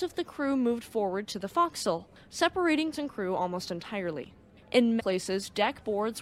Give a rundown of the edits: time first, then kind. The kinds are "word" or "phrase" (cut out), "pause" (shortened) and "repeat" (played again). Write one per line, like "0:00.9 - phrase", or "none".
0:02.9 - word
0:05.0 - word